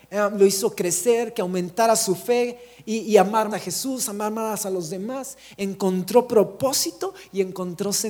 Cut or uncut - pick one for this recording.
cut